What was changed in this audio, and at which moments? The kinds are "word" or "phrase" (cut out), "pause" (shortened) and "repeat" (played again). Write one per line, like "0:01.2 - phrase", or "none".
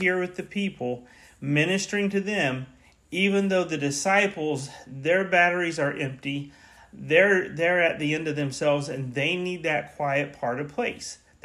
none